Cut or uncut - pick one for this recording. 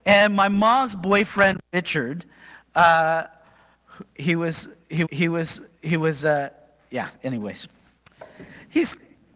cut